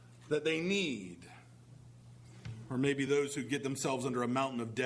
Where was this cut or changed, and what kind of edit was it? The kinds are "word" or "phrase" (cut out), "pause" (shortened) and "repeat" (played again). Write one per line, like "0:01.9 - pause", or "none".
none